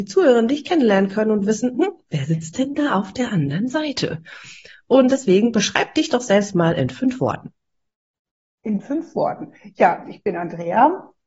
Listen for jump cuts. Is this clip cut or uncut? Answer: uncut